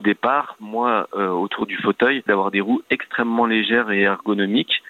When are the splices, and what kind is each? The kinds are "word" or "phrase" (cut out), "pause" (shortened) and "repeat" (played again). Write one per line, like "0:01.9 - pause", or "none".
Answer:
0:02.3 - phrase

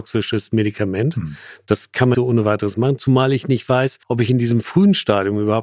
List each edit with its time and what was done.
0:02.1 - word
0:04.0 - pause

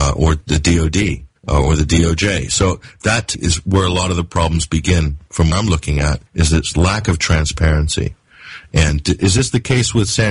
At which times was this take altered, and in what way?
0:01.4 - pause
0:03.3 - word
0:05.5 - word
0:06.3 - pause
0:09.2 - word

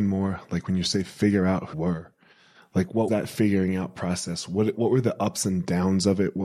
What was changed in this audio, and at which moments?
0:01.7 - word
0:03.1 - word
0:04.8 - word

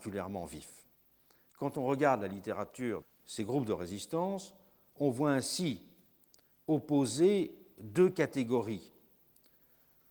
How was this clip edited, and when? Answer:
0:03.0 - word

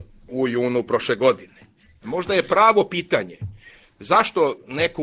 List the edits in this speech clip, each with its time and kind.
none

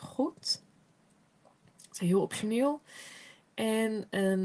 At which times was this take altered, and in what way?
0:02.0 - word

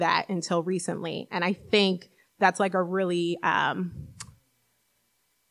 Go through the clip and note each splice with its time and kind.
none

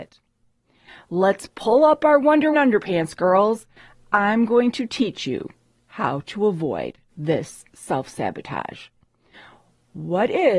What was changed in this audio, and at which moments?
0:02.5 - word

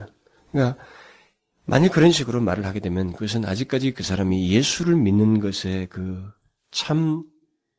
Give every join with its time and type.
none

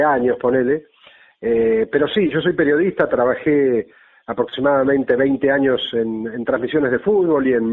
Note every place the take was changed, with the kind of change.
none

